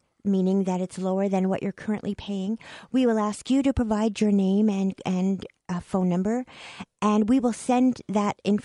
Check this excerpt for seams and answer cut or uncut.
uncut